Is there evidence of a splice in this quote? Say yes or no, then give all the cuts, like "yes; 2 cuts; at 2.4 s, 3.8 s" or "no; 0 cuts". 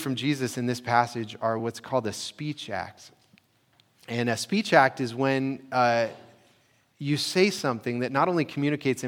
no; 0 cuts